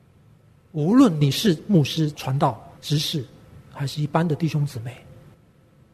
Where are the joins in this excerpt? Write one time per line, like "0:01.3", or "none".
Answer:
0:02.1
0:02.8